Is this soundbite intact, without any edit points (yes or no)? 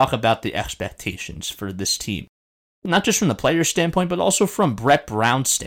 yes